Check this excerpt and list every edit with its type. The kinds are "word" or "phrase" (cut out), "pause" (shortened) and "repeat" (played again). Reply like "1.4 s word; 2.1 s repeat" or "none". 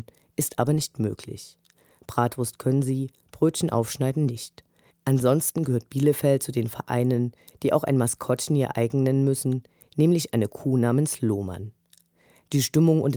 none